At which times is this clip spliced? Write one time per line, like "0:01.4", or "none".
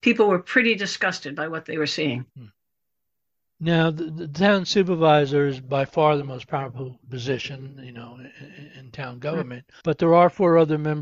0:02.3
0:09.8